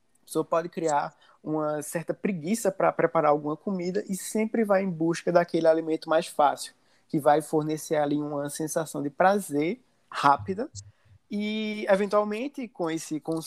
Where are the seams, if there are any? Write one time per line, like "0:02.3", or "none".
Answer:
none